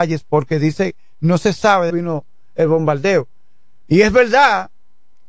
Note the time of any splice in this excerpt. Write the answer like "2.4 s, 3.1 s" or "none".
1.9 s